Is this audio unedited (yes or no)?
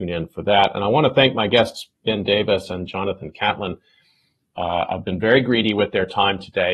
no